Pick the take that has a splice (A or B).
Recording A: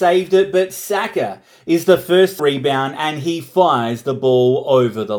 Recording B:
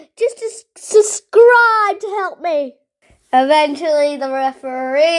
A